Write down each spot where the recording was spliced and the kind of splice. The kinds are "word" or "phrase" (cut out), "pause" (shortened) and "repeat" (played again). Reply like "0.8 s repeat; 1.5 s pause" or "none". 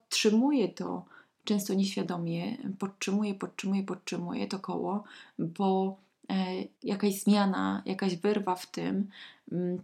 6.7 s pause